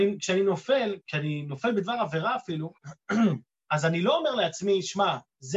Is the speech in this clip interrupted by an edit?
yes; 2 cuts; at 1.0 s, 2.8 s

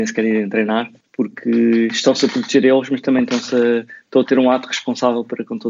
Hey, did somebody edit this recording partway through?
no; 0 cuts

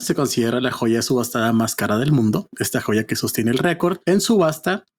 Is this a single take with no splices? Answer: yes; 0 cuts

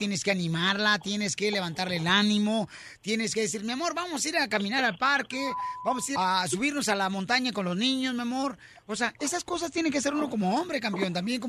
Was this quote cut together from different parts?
yes; 1 cut; at 6.2 s

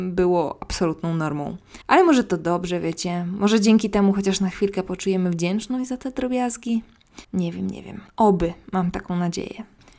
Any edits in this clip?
yes; 3 cuts; at 1.8 s, 7.2 s, 8.1 s

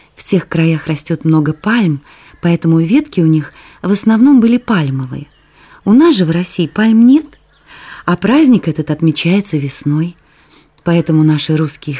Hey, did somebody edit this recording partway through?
no; 0 cuts

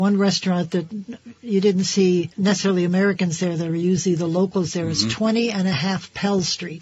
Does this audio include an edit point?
yes; 1 cut; at 2.3 s

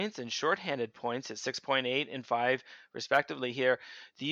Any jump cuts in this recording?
no; 0 cuts

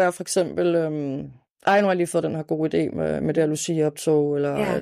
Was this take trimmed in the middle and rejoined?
no; 0 cuts

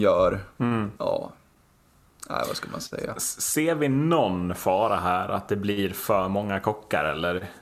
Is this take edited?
yes; 1 cut; at 1.0 s

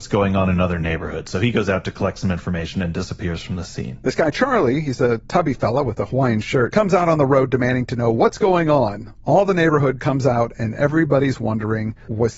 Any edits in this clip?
no; 0 cuts

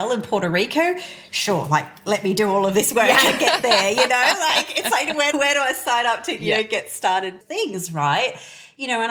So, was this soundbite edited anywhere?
yes; 2 cuts; at 5.3 s, 7.4 s

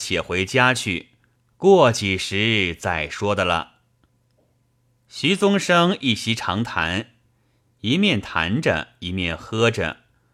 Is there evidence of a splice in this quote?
no; 0 cuts

